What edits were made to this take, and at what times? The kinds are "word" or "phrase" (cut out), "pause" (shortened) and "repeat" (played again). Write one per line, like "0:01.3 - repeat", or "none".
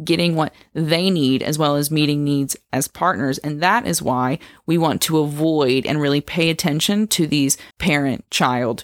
0:07.7 - pause